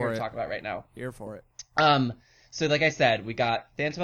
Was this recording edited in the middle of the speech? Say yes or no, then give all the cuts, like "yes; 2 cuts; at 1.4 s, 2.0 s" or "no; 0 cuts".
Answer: no; 0 cuts